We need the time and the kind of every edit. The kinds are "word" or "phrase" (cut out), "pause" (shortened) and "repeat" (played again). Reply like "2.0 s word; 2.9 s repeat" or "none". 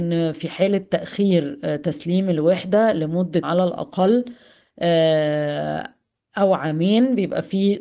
3.4 s word